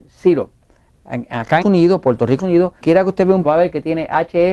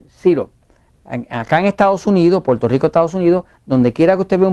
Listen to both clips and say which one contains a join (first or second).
first